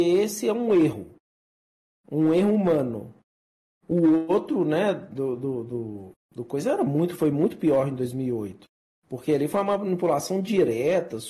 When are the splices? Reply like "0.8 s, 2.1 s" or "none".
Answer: none